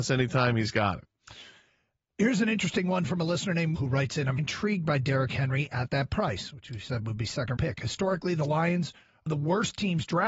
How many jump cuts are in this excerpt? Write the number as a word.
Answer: four